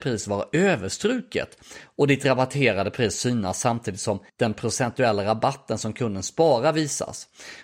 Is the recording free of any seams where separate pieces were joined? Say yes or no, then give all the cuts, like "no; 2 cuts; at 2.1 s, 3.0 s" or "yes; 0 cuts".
no; 1 cut; at 4.3 s